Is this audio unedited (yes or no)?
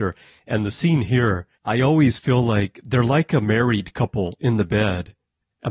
no